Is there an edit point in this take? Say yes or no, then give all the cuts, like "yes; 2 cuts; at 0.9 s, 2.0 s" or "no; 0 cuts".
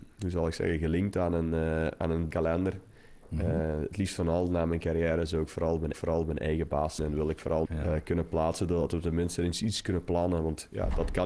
yes; 4 cuts; at 2.3 s, 5.9 s, 7.0 s, 7.7 s